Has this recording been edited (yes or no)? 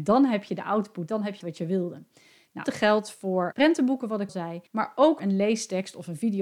yes